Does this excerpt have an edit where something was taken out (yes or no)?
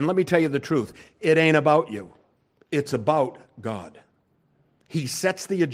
no